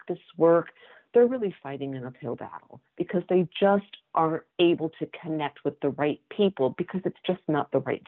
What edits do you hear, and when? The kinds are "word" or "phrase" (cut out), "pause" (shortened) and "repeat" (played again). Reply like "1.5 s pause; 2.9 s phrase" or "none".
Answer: 4.5 s pause